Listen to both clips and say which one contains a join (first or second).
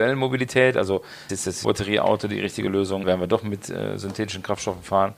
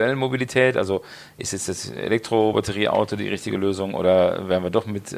first